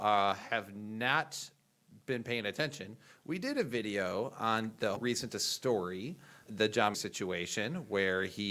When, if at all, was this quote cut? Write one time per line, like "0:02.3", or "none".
0:05.0
0:06.5
0:06.9